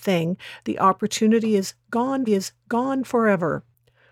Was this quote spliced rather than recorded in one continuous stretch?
yes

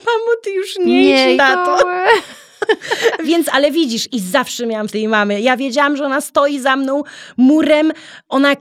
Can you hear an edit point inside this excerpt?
yes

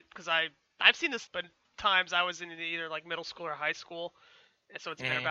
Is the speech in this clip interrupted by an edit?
yes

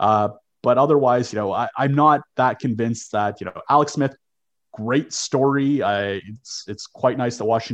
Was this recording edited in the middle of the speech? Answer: no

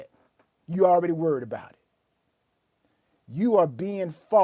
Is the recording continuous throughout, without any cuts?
yes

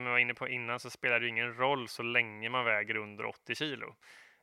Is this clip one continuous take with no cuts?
yes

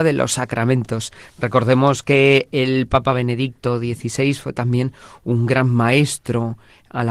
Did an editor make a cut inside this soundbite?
no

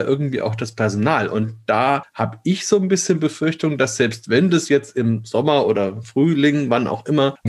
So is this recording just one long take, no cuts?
yes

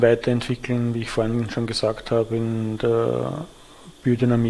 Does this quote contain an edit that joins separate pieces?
no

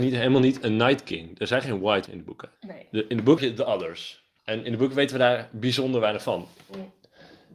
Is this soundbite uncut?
no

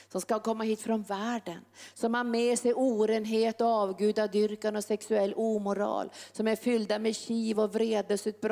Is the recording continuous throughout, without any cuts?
yes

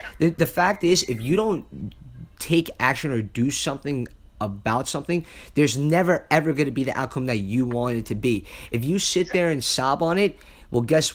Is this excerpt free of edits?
yes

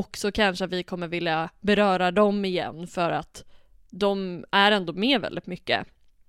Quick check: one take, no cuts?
yes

